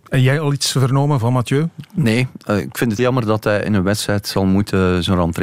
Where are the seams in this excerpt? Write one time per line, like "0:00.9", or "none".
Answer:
0:03.0